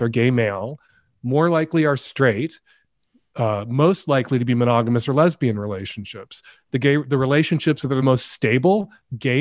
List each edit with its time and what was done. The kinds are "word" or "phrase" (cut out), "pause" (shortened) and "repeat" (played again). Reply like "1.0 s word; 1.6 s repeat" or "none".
none